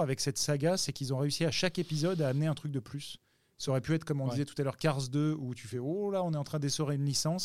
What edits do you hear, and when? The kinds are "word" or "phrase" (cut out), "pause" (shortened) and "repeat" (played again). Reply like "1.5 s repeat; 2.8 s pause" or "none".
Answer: none